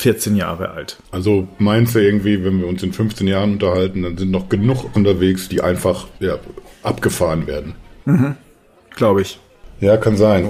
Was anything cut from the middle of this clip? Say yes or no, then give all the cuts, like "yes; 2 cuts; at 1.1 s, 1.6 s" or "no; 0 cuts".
yes; 4 cuts; at 1.0 s, 4.9 s, 6.2 s, 8.7 s